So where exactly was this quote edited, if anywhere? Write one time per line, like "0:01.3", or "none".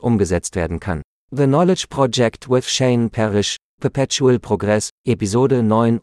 0:01.1
0:03.8

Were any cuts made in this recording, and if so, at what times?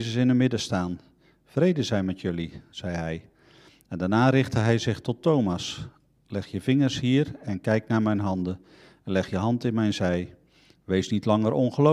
none

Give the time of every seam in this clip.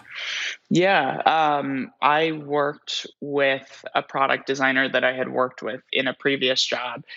0:02.0
0:03.1

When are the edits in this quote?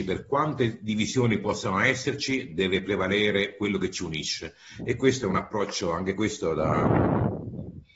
none

